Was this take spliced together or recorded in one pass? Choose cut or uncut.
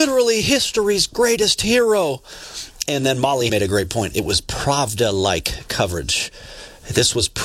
cut